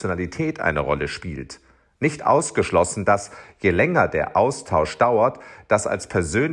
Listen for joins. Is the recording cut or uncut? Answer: uncut